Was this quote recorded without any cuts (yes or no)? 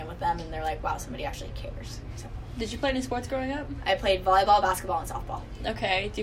yes